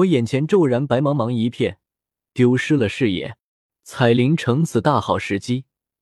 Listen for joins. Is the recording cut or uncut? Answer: uncut